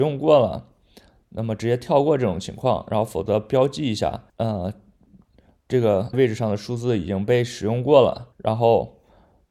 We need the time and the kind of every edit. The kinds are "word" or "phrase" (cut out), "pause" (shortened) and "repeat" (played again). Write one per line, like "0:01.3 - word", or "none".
0:04.3 - pause
0:06.1 - word
0:08.3 - pause